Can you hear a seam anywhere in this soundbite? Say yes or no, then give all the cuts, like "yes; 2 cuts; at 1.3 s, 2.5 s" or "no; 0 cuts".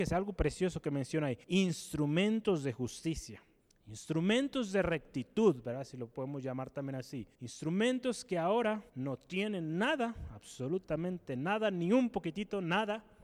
yes; 4 cuts; at 1.4 s, 3.6 s, 7.3 s, 8.9 s